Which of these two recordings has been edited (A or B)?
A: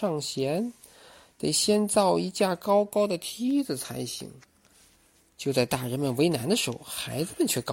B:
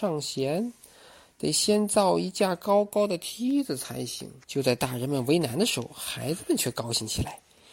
B